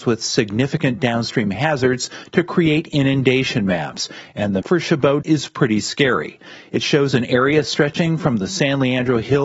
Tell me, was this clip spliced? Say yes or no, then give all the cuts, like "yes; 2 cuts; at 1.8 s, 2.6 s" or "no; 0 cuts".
yes; 2 cuts; at 4.6 s, 5.2 s